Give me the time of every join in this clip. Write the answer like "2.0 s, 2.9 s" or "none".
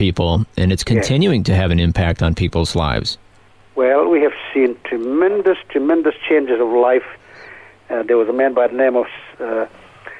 none